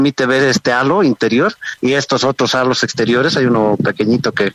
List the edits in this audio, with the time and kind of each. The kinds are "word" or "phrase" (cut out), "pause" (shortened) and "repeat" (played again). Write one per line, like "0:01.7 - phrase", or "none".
none